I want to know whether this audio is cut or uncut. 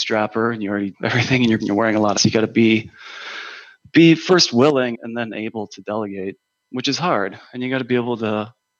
cut